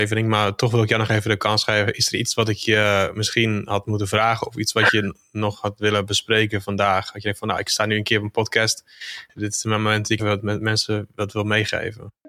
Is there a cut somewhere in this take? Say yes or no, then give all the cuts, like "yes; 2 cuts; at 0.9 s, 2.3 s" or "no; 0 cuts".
yes; 2 cuts; at 9.3 s, 10.2 s